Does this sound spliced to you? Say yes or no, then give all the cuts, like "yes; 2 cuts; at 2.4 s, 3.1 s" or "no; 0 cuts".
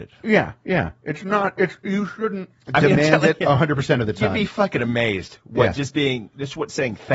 yes; 1 cut; at 2.6 s